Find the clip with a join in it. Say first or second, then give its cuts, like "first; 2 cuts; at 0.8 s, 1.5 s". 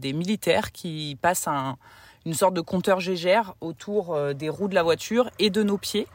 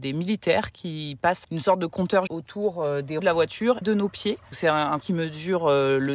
second; 6 cuts; at 1.4 s, 2.3 s, 3.2 s, 3.8 s, 4.5 s, 5.0 s